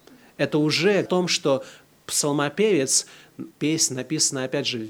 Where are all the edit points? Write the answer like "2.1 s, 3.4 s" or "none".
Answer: 1.1 s, 3.5 s